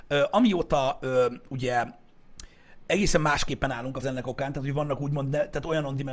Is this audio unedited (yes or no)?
no